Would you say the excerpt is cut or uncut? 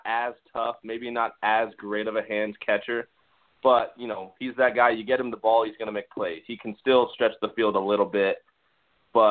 uncut